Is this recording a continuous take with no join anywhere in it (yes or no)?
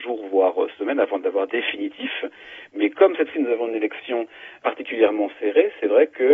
no